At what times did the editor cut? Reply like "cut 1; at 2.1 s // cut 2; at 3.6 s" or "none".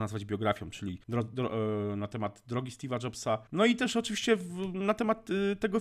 cut 1; at 1.0 s // cut 2; at 3.5 s